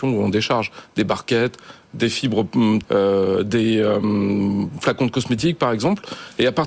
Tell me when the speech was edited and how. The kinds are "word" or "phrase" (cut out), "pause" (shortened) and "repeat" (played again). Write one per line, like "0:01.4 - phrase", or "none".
0:02.8 - word